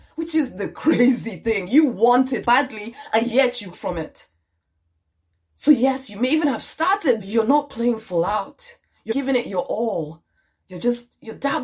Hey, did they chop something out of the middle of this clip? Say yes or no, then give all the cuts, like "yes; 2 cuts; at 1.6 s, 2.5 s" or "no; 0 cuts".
yes; 4 cuts; at 2.4 s, 3.7 s, 7.2 s, 9.1 s